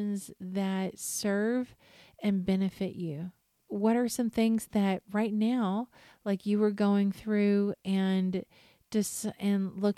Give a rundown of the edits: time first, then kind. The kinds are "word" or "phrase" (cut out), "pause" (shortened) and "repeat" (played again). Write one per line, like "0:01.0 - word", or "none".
none